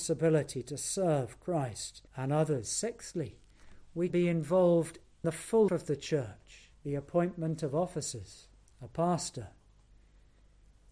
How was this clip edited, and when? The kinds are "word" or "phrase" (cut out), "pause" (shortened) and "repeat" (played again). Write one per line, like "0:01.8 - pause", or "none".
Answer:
0:02.1 - pause
0:04.1 - word
0:05.2 - word
0:05.7 - word
0:06.7 - pause
0:08.6 - pause